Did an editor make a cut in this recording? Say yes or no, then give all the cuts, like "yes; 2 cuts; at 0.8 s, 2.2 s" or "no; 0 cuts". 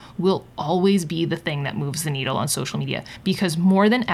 no; 0 cuts